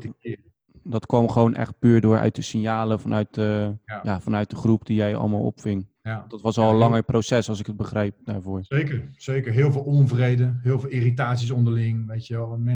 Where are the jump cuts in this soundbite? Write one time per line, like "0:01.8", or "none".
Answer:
0:03.8
0:06.0